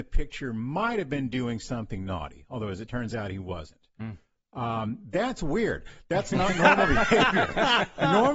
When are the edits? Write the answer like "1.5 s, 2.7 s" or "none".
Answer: none